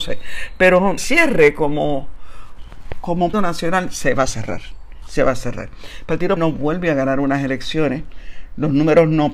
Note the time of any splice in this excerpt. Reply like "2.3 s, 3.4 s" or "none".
1.0 s, 3.3 s, 6.4 s